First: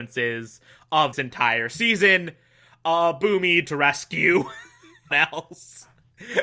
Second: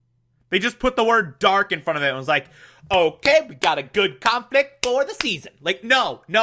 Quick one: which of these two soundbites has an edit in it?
first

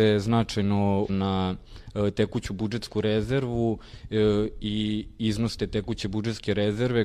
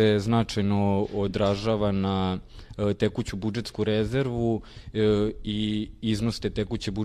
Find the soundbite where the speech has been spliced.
first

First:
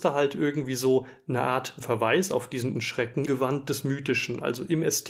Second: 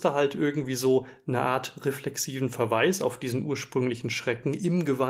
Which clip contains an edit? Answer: first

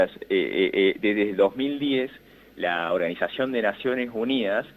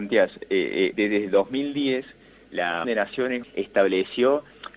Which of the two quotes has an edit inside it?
second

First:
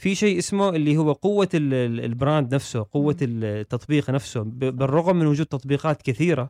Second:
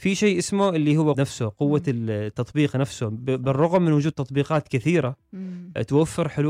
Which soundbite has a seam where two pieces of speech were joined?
second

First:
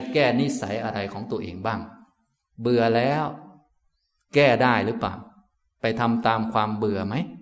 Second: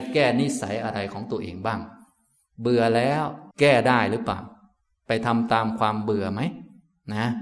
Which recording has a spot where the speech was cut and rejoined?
second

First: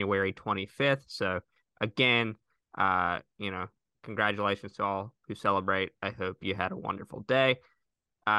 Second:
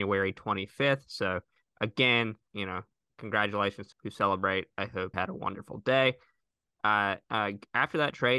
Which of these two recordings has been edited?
second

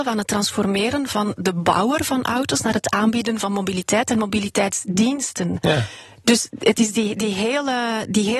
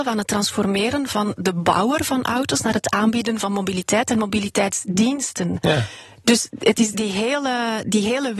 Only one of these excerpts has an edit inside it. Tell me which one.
second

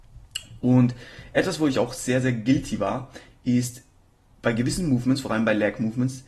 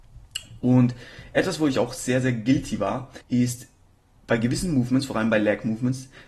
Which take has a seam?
second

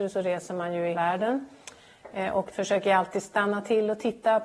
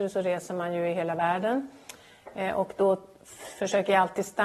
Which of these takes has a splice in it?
first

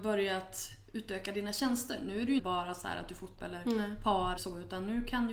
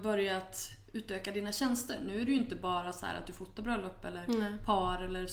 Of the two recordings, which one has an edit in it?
first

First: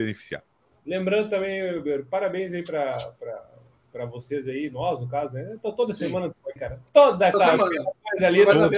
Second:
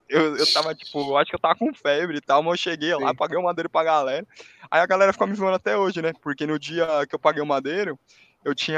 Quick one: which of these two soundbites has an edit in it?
first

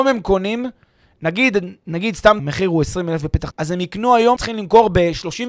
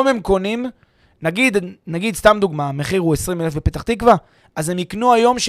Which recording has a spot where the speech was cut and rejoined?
first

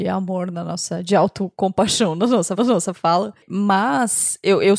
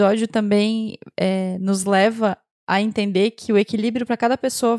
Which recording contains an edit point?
first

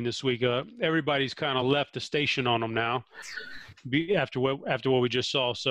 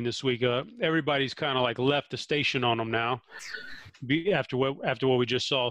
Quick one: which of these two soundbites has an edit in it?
first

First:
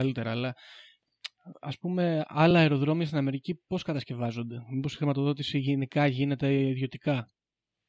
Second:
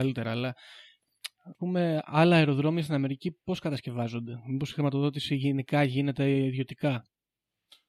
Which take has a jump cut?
second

